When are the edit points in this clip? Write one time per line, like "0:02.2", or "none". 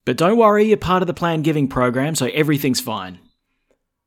0:01.1